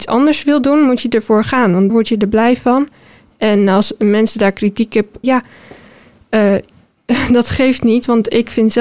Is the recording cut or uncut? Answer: cut